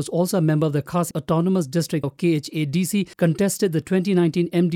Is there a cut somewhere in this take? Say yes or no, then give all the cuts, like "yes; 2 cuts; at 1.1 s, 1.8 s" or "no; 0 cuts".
yes; 3 cuts; at 1.1 s, 2.0 s, 3.1 s